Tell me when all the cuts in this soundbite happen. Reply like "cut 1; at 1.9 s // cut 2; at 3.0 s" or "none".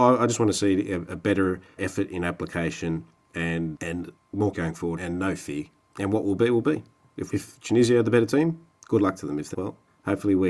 cut 1; at 1.8 s // cut 2; at 3.8 s // cut 3; at 4.5 s // cut 4; at 5.0 s // cut 5; at 7.3 s // cut 6; at 9.5 s